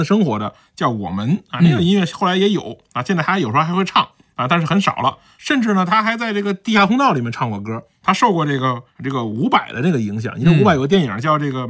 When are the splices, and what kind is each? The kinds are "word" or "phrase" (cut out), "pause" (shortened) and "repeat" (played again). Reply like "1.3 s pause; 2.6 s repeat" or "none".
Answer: none